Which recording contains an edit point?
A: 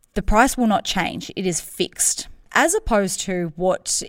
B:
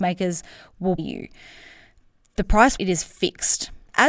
B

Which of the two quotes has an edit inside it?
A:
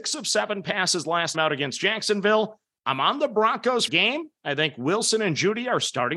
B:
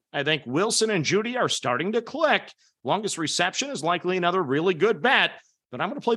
A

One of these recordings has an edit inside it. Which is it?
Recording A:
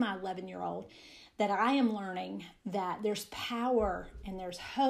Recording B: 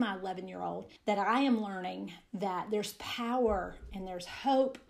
B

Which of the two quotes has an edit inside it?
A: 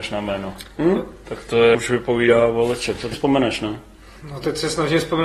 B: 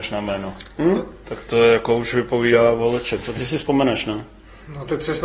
A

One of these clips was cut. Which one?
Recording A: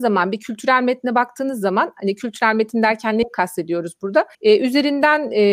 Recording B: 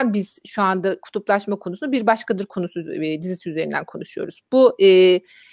A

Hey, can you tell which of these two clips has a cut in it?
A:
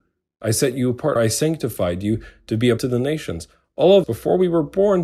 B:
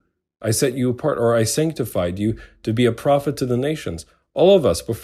A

